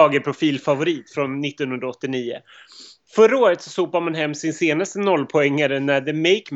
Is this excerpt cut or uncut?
uncut